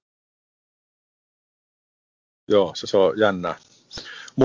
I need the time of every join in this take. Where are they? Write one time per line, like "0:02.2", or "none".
0:02.8